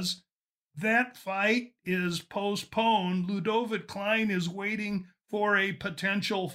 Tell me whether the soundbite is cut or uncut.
uncut